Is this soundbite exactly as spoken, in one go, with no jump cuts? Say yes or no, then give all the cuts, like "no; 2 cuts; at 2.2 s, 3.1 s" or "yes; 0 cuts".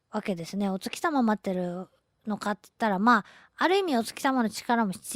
yes; 0 cuts